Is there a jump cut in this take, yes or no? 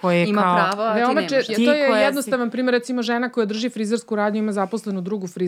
yes